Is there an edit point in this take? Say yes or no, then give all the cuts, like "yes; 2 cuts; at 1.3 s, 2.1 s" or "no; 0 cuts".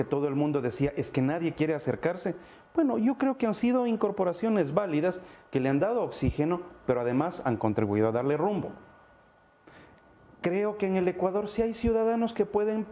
no; 0 cuts